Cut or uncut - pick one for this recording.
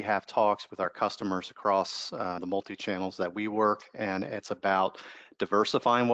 cut